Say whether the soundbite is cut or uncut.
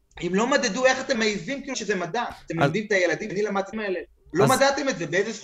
cut